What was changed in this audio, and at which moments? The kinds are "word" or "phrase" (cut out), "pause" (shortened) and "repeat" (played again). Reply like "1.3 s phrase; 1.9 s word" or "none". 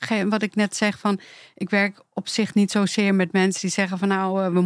none